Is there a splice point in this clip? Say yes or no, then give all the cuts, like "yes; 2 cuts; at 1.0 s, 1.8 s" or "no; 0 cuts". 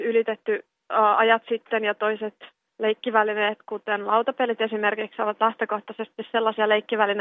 no; 0 cuts